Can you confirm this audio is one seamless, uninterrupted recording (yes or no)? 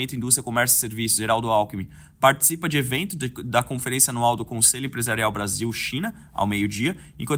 yes